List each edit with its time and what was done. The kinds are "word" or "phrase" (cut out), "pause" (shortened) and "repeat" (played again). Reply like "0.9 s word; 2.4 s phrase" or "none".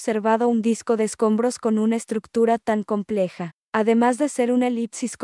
3.6 s pause